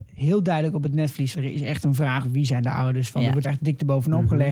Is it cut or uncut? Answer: cut